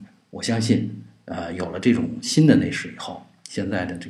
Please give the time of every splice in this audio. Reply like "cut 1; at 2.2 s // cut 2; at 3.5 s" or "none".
none